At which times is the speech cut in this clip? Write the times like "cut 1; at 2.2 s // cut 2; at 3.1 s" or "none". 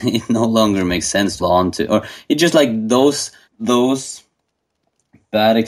cut 1; at 1.4 s // cut 2; at 3.5 s